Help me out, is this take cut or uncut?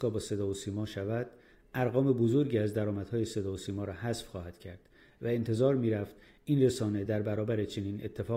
uncut